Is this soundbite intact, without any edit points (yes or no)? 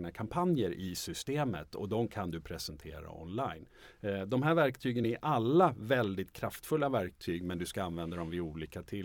yes